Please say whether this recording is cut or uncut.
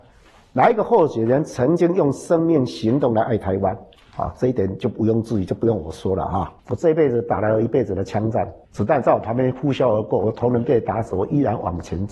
cut